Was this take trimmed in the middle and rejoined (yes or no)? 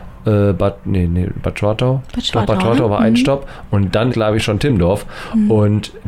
yes